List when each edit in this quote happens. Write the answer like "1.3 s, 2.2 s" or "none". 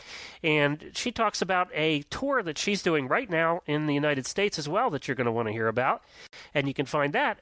none